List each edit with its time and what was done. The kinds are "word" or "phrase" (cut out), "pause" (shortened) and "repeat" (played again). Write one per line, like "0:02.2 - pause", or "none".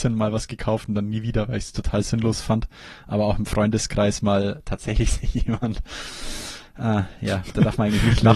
none